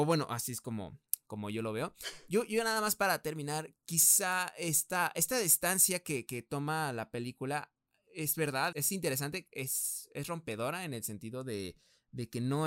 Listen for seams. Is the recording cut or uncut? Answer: cut